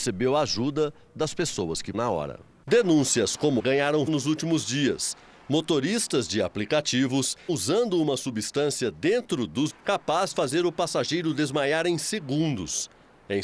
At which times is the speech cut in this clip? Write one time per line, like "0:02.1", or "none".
0:01.9
0:03.6
0:04.1
0:07.5
0:09.7
0:10.3